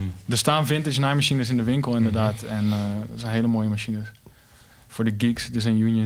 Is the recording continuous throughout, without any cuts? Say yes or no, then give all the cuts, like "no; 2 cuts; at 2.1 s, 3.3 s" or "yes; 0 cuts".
yes; 0 cuts